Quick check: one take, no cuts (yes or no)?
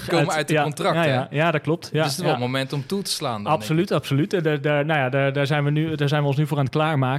yes